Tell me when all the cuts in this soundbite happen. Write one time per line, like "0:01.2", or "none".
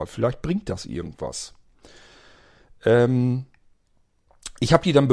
none